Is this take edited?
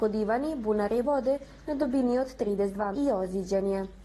yes; 2 cuts; at 1.0 s, 2.9 s

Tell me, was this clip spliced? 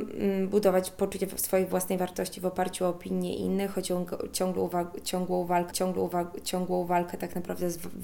yes; 1 cut; at 5.7 s

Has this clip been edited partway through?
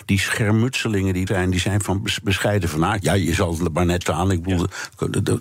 yes; 2 cuts; at 1.3 s, 4.0 s

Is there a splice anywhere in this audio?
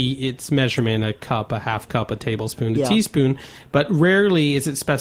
no; 0 cuts

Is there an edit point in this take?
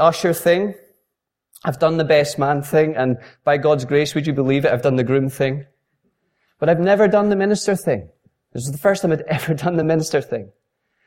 no; 0 cuts

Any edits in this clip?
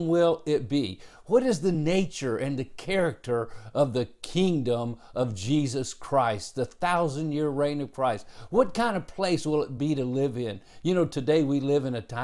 no; 0 cuts

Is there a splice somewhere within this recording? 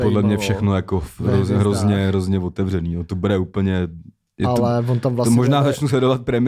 no; 0 cuts

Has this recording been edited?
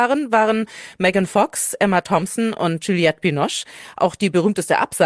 no; 0 cuts

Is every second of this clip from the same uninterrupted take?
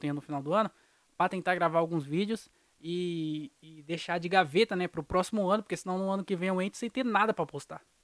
yes; 0 cuts

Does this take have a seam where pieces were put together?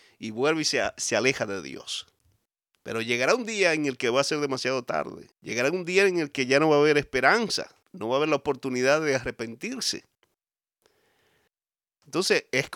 yes; 3 cuts; at 2.5 s, 5.3 s, 7.8 s

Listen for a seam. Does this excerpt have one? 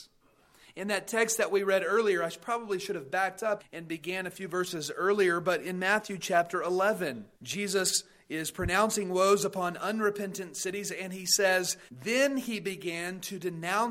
yes; 3 cuts; at 3.6 s, 7.3 s, 11.9 s

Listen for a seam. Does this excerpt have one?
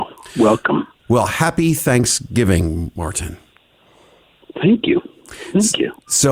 no; 0 cuts

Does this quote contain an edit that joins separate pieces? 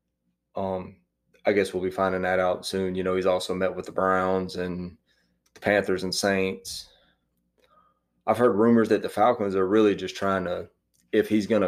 no; 0 cuts

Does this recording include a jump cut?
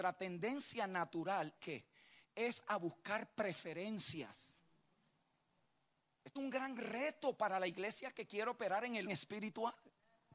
yes; 3 cuts; at 1.6 s, 6.4 s, 9.1 s

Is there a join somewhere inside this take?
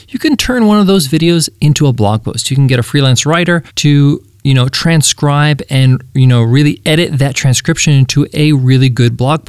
yes; 1 cut; at 3.7 s

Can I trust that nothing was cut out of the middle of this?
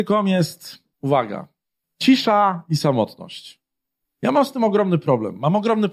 no; 1 cut; at 0.9 s

